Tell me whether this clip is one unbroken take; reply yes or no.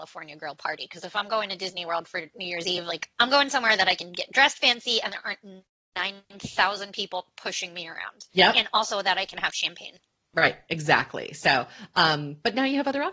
yes